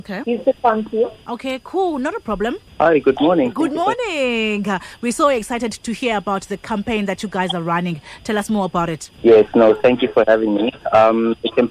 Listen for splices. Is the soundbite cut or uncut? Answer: uncut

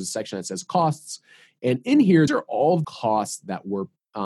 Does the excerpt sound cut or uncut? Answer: cut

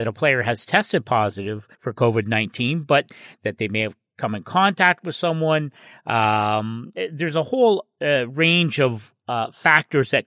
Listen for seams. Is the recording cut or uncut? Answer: cut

